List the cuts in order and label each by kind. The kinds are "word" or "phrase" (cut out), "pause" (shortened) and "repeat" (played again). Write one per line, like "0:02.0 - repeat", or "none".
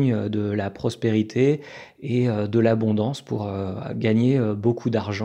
none